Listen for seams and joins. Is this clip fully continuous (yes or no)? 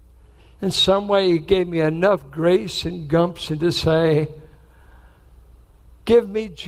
yes